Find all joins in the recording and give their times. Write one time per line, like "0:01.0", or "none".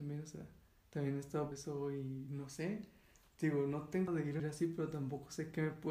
0:01.5
0:04.1
0:04.4